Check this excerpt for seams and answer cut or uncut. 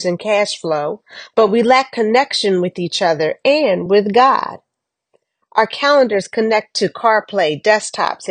uncut